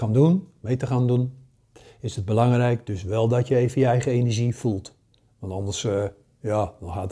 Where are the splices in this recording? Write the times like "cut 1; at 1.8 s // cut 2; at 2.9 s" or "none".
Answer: none